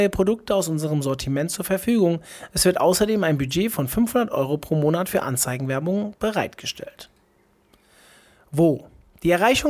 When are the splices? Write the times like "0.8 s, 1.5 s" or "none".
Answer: none